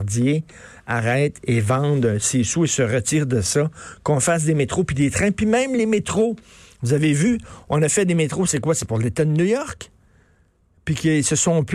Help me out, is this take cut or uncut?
uncut